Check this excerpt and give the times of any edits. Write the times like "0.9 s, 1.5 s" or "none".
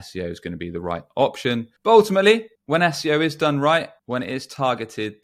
1.8 s, 2.6 s, 4.0 s